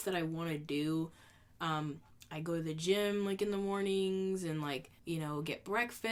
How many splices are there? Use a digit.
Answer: 2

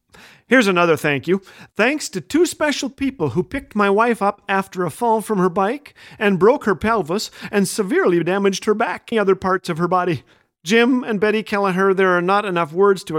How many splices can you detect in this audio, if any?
1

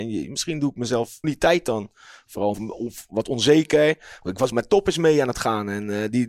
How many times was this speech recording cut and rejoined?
3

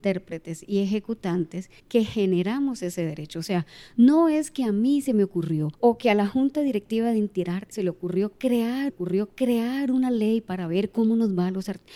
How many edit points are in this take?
4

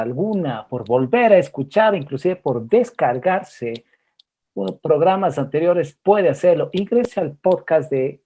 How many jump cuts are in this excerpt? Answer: 0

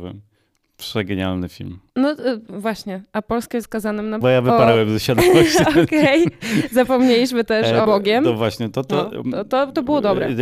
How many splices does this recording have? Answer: 4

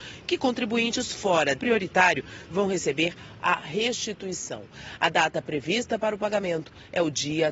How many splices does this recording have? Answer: 1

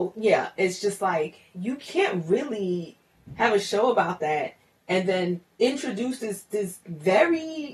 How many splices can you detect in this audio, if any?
0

